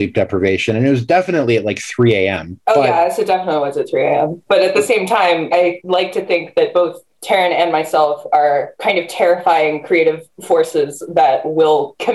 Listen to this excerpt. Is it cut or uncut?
uncut